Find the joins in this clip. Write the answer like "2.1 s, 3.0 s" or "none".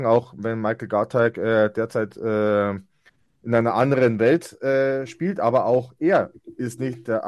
3.1 s